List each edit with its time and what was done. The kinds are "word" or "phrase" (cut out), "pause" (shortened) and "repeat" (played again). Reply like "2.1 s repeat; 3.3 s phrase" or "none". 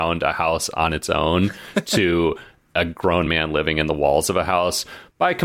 none